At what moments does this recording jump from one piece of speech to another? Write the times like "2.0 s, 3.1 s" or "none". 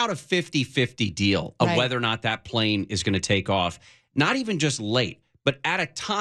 none